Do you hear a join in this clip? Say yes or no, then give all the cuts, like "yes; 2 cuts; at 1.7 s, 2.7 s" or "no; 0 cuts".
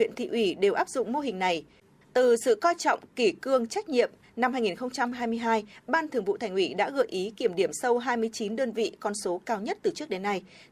no; 0 cuts